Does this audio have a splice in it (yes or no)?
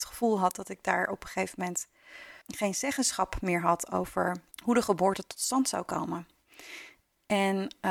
yes